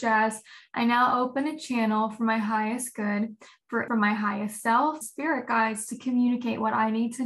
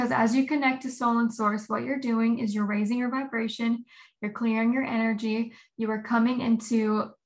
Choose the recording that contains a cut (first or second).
first